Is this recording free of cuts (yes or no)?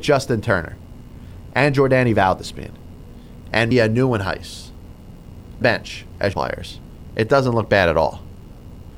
no